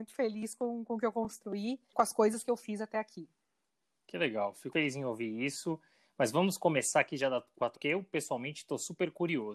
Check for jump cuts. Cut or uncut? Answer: cut